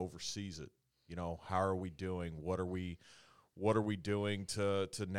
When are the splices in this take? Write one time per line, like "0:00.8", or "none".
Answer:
none